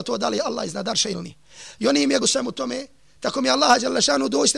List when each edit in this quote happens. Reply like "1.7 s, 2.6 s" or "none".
2.2 s